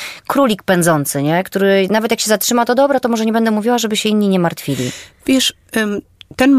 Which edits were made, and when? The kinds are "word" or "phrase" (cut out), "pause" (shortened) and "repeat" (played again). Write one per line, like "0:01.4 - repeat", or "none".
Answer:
none